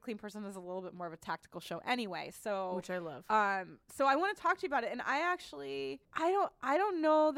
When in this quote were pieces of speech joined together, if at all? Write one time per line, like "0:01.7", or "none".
0:06.0